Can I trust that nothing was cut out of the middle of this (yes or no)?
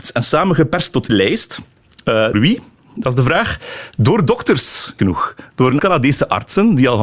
no